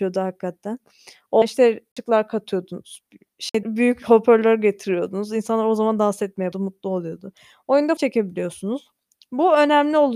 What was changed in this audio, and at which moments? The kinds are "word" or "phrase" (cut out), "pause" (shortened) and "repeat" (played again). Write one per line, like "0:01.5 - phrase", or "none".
0:01.4 - word
0:03.6 - word
0:06.5 - word
0:08.0 - word

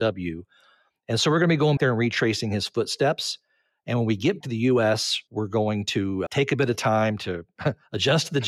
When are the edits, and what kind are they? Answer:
0:01.8 - word
0:04.4 - word
0:06.3 - word

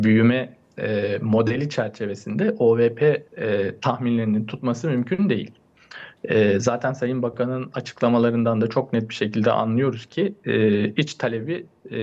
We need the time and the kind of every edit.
0:03.3 - pause

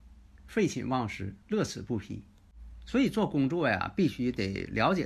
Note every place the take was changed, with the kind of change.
0:01.4 - pause

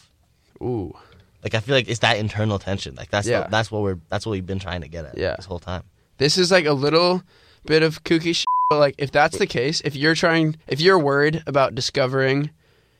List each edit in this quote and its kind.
0:10.6 - pause

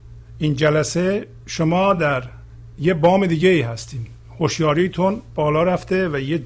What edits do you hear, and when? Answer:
none

